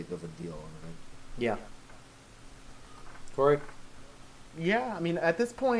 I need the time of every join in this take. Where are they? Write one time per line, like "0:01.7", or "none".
0:04.5